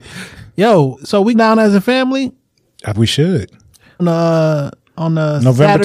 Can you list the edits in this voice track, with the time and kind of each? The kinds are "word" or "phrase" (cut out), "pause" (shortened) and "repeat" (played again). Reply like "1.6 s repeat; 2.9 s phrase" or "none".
0.9 s word; 1.3 s word; 2.9 s word; 4.0 s word